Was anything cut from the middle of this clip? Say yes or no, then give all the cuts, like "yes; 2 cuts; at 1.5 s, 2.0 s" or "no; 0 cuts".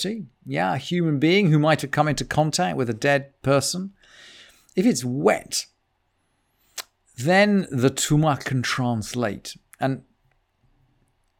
no; 0 cuts